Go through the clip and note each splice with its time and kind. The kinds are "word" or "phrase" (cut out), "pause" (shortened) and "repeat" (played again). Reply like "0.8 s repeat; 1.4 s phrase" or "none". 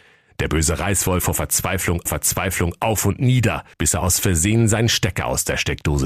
1.2 s word; 2.1 s repeat; 3.7 s pause